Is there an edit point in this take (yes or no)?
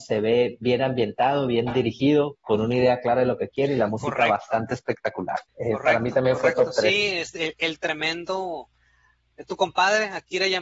yes